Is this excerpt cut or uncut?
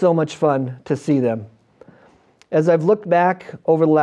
uncut